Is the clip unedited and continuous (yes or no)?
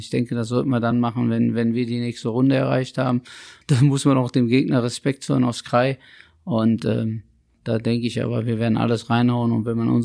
yes